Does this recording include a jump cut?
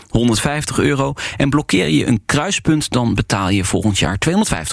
no; 0 cuts

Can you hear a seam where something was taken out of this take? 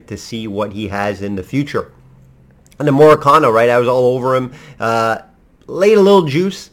no; 0 cuts

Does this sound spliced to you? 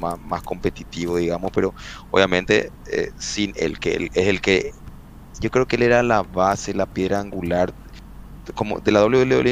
no; 0 cuts

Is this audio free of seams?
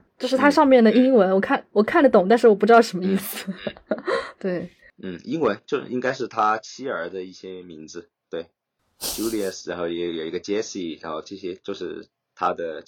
yes; 0 cuts

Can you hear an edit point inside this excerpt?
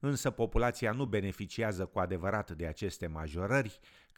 no; 0 cuts

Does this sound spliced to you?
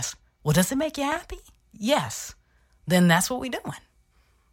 no; 0 cuts

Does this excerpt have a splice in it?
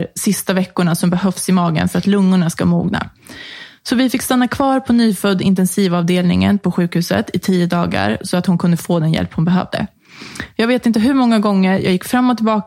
no; 0 cuts

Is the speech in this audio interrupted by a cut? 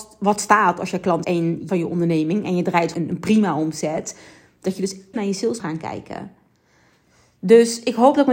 yes; 5 cuts; at 1.2 s, 1.7 s, 2.9 s, 5.1 s, 5.6 s

